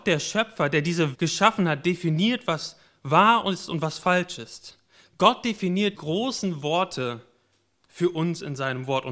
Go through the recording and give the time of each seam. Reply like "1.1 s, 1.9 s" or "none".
1.1 s, 5.9 s

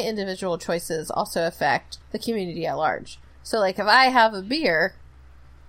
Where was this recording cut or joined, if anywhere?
2.0 s

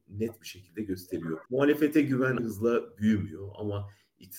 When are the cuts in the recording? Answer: 1.5 s, 2.4 s

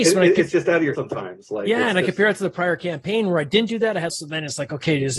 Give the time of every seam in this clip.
0.9 s, 4.1 s

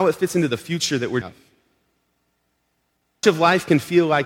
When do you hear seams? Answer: 1.2 s, 3.2 s

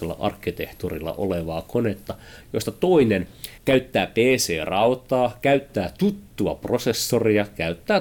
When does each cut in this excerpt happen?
3.6 s

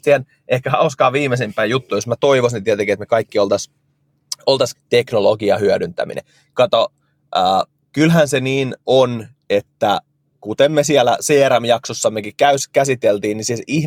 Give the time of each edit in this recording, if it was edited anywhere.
4.7 s

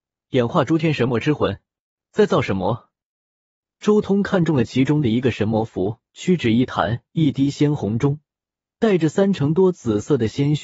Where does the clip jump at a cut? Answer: 1.9 s, 6.1 s, 7.1 s

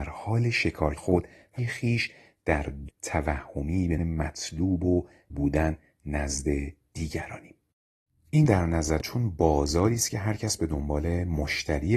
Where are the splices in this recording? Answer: 1.0 s, 1.6 s, 2.9 s, 4.0 s, 5.3 s, 8.5 s, 9.0 s

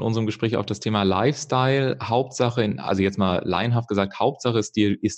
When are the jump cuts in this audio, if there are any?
none

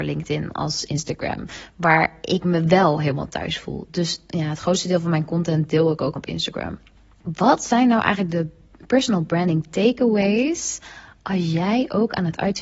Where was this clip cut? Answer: 6.2 s

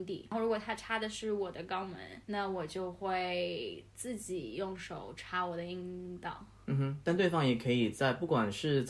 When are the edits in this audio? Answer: 2.2 s

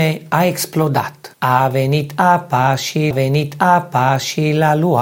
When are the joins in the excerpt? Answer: 1.3 s, 3.1 s

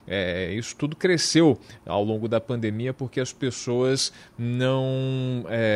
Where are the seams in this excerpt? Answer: none

